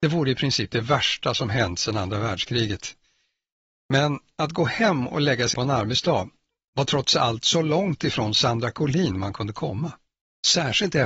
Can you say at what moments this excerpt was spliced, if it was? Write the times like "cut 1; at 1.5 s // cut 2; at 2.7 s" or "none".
cut 1; at 5.5 s